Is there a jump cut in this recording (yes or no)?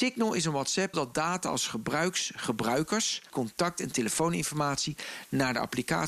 yes